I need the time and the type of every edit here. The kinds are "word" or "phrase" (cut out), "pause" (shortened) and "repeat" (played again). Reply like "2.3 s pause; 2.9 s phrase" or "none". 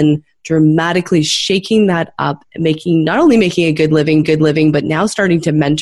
4.2 s repeat